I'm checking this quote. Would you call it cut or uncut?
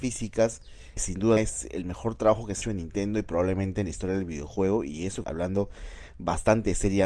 cut